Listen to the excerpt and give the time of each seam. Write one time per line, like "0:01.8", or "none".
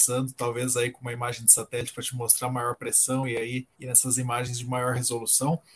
0:03.7